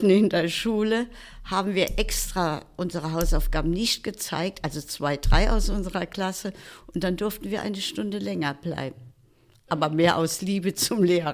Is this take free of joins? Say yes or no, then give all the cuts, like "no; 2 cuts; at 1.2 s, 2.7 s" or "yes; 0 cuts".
yes; 0 cuts